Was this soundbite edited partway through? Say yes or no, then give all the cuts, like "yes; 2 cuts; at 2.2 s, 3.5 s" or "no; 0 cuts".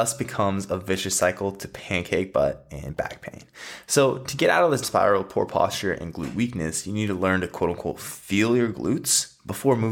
yes; 1 cut; at 4.8 s